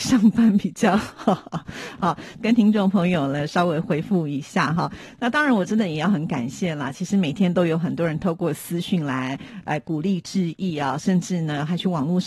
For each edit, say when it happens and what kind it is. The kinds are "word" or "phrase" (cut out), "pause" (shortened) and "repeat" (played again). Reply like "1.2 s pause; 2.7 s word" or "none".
2.4 s phrase